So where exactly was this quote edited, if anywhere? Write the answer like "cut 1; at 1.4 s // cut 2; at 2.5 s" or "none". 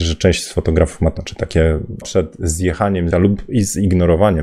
cut 1; at 1.2 s // cut 2; at 2.0 s // cut 3; at 3.1 s